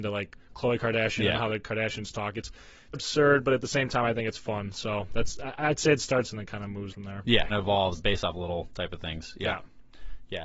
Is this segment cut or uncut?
cut